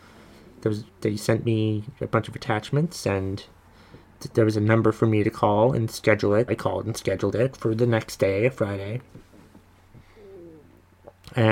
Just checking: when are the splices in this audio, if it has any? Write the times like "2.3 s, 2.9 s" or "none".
6.5 s